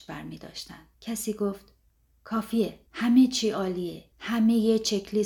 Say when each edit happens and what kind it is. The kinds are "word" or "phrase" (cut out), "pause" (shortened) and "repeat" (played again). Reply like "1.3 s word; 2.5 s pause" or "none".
0.9 s pause; 2.9 s pause; 4.1 s pause